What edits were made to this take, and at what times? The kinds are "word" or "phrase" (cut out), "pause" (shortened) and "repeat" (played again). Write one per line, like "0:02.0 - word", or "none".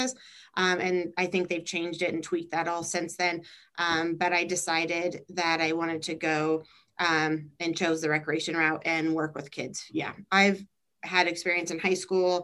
none